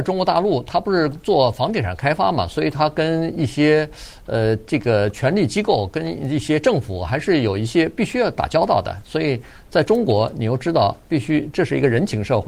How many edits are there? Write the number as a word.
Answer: zero